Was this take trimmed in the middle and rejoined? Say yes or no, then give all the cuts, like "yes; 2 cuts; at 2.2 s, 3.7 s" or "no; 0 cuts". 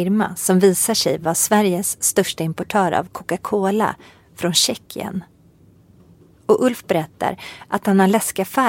no; 0 cuts